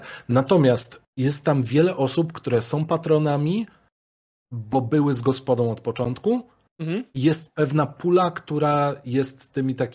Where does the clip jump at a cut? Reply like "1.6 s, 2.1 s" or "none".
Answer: 1.1 s

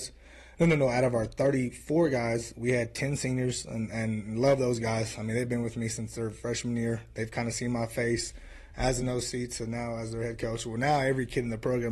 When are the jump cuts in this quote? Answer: none

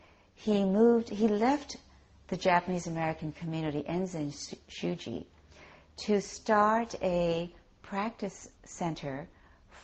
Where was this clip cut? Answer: 8.5 s

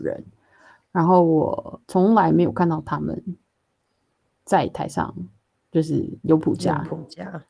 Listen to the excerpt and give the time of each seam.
1.8 s, 6.2 s

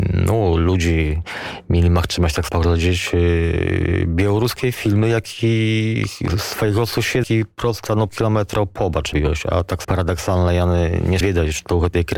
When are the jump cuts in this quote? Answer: 2.5 s, 7.2 s, 8.1 s, 9.1 s, 9.8 s, 11.2 s

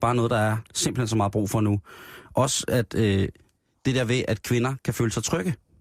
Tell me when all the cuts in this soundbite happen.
none

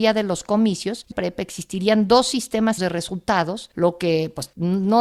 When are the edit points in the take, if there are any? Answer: 1.1 s, 2.8 s

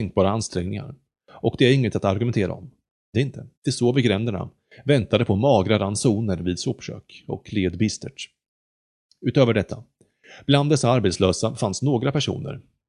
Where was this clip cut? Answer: 3.1 s, 3.5 s

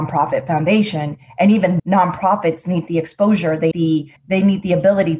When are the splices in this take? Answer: 1.8 s, 3.7 s, 4.2 s

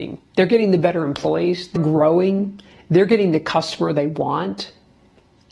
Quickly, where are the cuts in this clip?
1.8 s

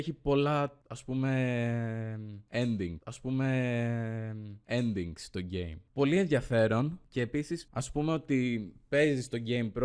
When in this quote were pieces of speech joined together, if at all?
3.0 s

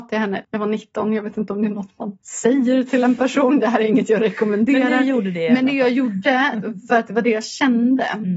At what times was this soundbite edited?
2.2 s

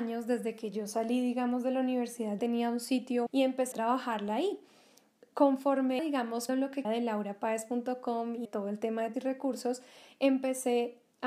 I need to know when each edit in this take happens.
2.4 s, 3.3 s, 3.7 s, 6.0 s, 6.5 s, 6.8 s, 8.4 s, 9.1 s

